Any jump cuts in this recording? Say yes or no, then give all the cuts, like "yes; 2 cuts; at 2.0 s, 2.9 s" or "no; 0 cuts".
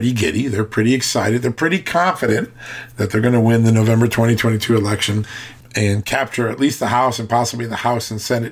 no; 0 cuts